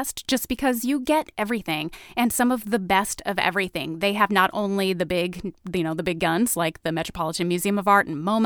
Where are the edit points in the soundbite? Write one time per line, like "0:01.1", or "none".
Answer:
none